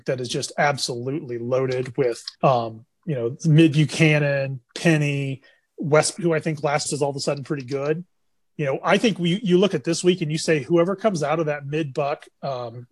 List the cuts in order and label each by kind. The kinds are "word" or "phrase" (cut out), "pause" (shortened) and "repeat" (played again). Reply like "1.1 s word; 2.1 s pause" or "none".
2.3 s pause; 4.7 s pause; 6.2 s word; 6.9 s phrase; 8.4 s word